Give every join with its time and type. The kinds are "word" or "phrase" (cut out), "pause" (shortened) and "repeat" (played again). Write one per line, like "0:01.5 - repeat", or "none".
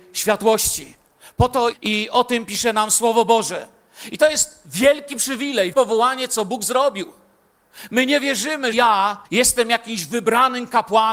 0:01.7 - word
0:05.7 - word
0:08.7 - word
0:09.2 - pause